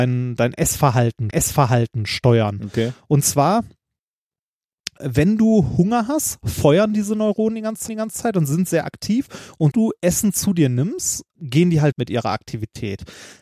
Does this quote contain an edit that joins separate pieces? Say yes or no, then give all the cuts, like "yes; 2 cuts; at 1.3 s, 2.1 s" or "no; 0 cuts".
yes; 6 cuts; at 1.3 s, 5.0 s, 7.9 s, 9.7 s, 11.3 s, 11.9 s